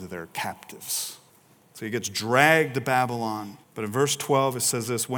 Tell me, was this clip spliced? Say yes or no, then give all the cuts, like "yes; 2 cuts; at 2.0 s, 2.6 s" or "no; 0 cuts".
yes; 2 cuts; at 1.3 s, 3.6 s